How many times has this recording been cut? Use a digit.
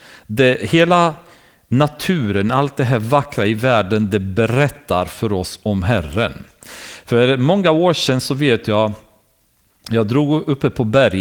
0